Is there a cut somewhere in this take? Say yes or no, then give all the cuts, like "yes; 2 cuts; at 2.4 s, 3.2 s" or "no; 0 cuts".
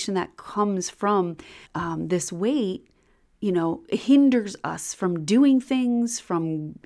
yes; 1 cut; at 1.7 s